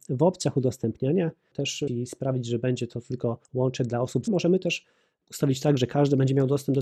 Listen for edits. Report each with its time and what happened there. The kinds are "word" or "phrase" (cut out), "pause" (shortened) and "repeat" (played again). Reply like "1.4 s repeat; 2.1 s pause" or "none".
1.9 s word; 3.4 s pause; 4.3 s phrase